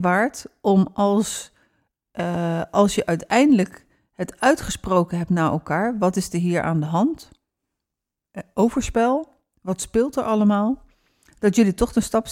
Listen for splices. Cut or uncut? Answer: uncut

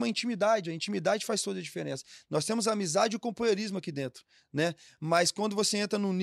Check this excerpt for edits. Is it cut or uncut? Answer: uncut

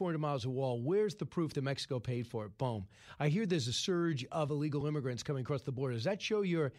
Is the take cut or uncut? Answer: uncut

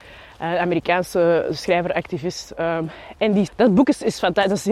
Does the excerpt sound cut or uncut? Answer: cut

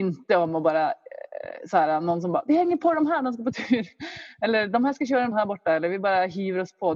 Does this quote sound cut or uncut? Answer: cut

